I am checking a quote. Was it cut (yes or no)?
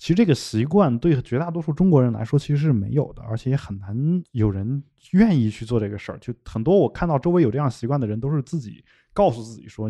no